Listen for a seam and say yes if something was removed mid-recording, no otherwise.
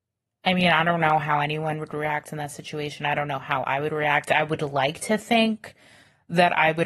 no